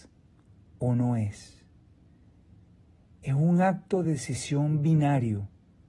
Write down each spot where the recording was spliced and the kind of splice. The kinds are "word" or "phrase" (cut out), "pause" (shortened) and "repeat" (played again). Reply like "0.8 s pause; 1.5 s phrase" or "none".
none